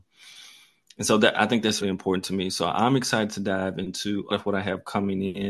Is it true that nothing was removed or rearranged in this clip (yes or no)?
no